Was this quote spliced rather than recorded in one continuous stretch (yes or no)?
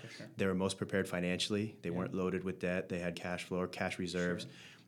yes